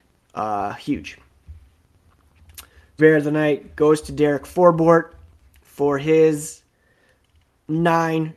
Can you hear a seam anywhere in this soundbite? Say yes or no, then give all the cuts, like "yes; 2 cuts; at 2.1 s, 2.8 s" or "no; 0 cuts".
yes; 1 cut; at 3.0 s